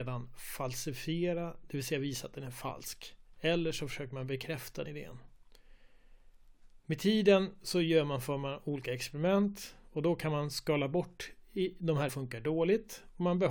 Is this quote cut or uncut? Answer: cut